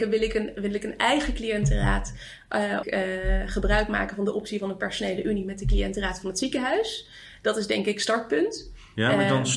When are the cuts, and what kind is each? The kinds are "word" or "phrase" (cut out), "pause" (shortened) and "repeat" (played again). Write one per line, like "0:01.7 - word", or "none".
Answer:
0:02.8 - phrase